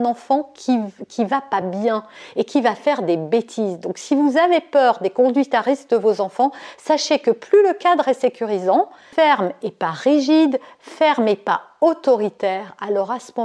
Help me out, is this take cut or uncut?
uncut